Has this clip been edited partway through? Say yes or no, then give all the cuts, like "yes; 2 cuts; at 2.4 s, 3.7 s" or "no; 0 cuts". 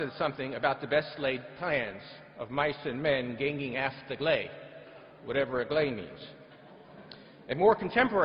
no; 0 cuts